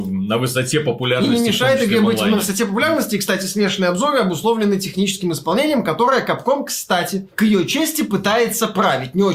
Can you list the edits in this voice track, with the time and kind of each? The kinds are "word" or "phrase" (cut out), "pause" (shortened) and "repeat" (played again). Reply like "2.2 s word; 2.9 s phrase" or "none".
none